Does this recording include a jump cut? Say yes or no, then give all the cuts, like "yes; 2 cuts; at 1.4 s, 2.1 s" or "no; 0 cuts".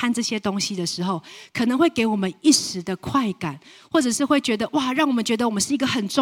no; 0 cuts